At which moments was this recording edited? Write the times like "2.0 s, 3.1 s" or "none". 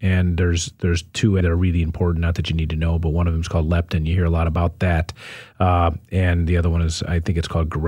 1.4 s